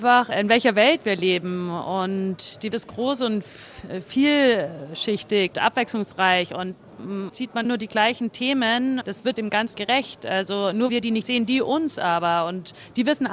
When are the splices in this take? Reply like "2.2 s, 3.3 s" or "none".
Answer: 2.7 s, 5.5 s, 7.3 s, 7.6 s, 9.0 s, 9.3 s, 9.7 s, 10.9 s, 11.2 s

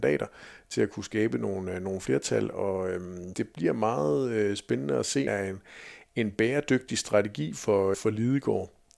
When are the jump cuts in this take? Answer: 5.3 s, 7.9 s

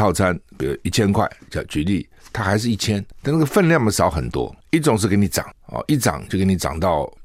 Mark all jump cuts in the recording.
none

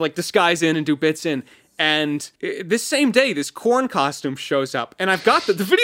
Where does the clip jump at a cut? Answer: 2.4 s

